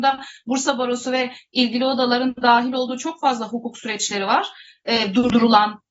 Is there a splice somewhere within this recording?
no; 0 cuts

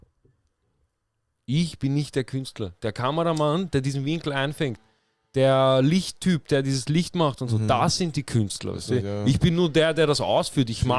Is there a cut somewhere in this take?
no; 0 cuts

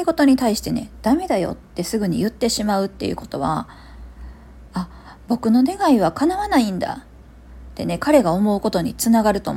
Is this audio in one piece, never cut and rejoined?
yes; 0 cuts

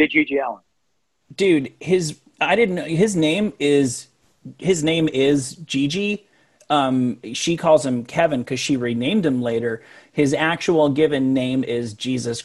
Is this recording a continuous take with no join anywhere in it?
yes; 0 cuts

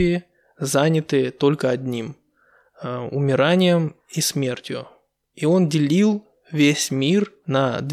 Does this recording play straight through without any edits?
yes; 0 cuts

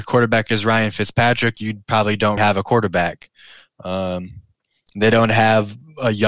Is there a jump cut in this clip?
yes; 1 cut; at 2.4 s

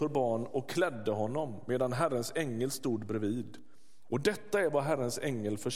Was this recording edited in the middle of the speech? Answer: no; 0 cuts

